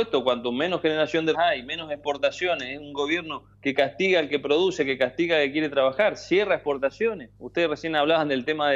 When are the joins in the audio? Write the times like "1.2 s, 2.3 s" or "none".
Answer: 1.3 s, 3.5 s, 7.4 s